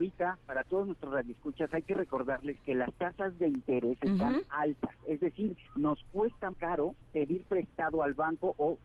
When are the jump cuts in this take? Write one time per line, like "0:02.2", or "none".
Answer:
0:05.6
0:06.5
0:07.0